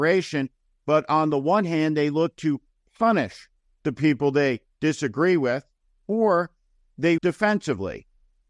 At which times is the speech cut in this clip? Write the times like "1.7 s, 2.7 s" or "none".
7.2 s